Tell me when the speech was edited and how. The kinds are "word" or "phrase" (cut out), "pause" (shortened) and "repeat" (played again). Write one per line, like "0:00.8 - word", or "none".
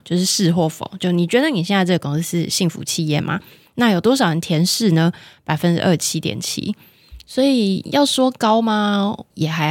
none